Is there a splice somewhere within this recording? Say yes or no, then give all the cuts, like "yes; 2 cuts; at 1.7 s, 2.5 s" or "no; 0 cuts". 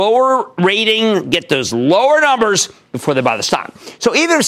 no; 0 cuts